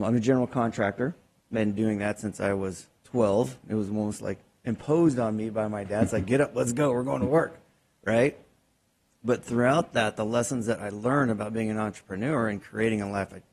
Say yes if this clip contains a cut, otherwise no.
no